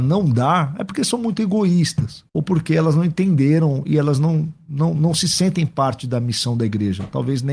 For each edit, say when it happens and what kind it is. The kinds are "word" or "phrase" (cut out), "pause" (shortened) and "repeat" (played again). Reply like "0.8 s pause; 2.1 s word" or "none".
2.3 s pause